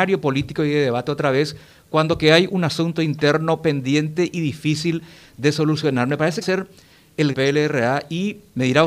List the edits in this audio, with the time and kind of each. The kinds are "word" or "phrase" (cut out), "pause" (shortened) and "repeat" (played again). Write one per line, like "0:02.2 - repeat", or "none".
0:06.4 - phrase
0:07.3 - phrase